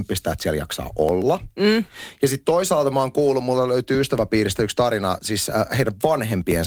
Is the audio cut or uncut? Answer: uncut